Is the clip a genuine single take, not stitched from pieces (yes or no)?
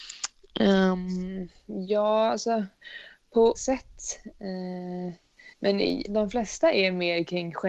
no